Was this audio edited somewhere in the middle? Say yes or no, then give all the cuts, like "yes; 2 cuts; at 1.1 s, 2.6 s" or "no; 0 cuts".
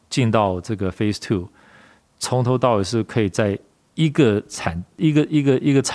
no; 0 cuts